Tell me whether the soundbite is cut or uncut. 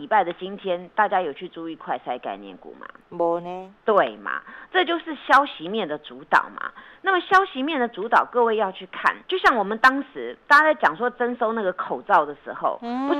cut